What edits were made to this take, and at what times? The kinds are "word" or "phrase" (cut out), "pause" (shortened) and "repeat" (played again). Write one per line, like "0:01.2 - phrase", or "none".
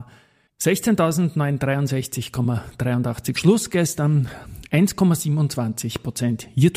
none